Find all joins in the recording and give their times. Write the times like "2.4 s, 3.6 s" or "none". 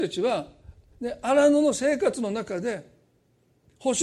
none